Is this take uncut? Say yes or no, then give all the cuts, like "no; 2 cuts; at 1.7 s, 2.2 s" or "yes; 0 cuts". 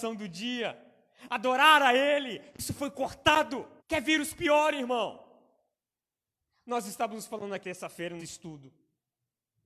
no; 3 cuts; at 3.8 s, 7.6 s, 8.2 s